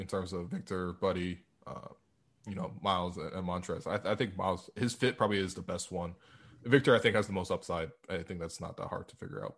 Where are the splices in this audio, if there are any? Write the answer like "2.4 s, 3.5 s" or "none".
none